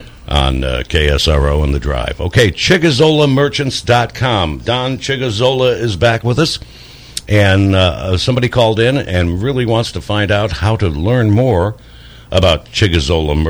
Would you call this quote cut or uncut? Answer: uncut